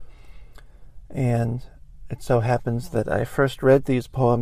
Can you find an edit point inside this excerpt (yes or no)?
no